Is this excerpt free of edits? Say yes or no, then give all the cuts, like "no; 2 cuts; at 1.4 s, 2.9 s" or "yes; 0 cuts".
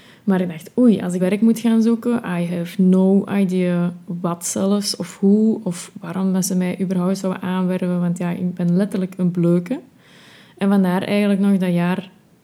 no; 1 cut; at 1.2 s